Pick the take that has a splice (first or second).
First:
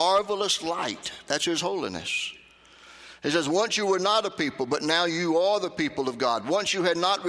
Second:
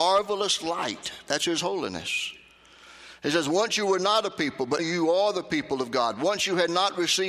second